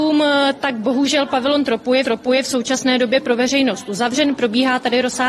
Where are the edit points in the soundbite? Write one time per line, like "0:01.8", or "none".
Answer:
0:02.0